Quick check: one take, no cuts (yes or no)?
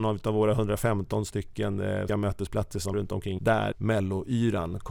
no